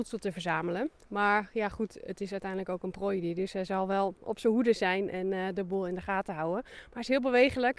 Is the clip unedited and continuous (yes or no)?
yes